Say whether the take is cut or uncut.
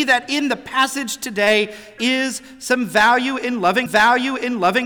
cut